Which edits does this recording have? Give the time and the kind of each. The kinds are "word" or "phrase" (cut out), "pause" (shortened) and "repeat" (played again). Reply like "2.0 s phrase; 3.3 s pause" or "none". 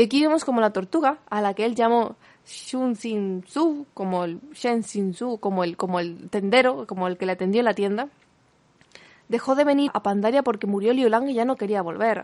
9.9 s word